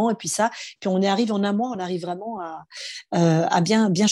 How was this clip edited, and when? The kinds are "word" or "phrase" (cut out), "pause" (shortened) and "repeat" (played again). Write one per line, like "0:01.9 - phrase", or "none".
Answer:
none